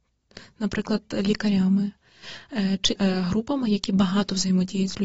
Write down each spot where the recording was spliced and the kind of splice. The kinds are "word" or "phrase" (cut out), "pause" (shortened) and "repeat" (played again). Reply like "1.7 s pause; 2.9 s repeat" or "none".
3.0 s word